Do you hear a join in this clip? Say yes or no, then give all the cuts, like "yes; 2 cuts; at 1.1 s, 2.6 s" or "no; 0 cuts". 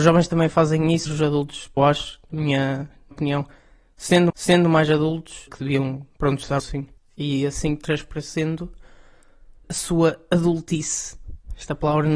yes; 9 cuts; at 1.1 s, 1.8 s, 3.1 s, 4.3 s, 5.5 s, 6.1 s, 6.6 s, 7.0 s, 9.6 s